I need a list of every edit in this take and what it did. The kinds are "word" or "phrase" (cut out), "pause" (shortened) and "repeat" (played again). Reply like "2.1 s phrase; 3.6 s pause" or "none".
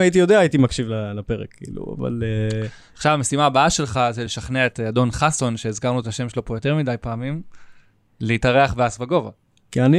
none